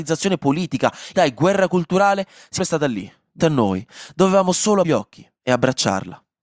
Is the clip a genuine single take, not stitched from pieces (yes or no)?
no